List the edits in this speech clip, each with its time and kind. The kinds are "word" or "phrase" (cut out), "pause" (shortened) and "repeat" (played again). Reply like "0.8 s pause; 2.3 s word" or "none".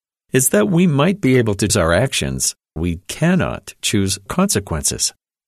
1.7 s word; 2.8 s word; 4.3 s word